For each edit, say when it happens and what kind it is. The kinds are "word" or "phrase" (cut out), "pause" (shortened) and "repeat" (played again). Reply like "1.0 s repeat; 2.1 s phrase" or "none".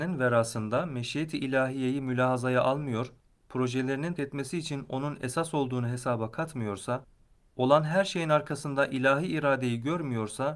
4.2 s word